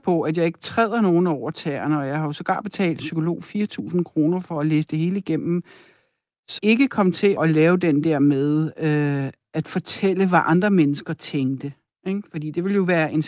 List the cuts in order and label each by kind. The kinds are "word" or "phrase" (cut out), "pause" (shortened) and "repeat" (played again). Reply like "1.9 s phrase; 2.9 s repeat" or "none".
3.0 s word; 6.6 s word; 7.4 s word